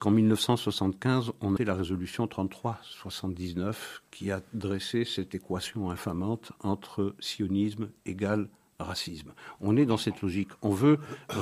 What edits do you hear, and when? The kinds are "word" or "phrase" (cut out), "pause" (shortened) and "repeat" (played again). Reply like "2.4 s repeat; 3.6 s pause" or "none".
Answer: 1.6 s phrase